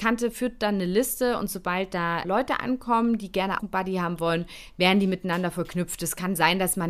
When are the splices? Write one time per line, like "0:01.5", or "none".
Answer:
0:02.2
0:03.6